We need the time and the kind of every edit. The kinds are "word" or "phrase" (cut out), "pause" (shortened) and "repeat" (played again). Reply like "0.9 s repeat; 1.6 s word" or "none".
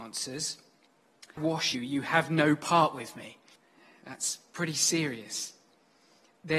1.4 s phrase; 1.7 s word; 3.6 s pause